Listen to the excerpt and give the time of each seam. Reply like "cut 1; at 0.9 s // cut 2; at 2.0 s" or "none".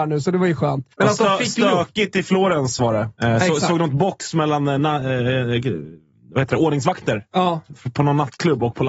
cut 1; at 0.9 s // cut 2; at 3.2 s